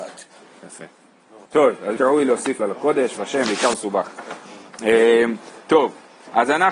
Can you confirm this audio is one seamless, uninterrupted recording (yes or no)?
no